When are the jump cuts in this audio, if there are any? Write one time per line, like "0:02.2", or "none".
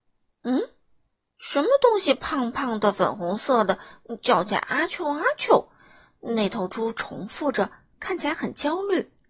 none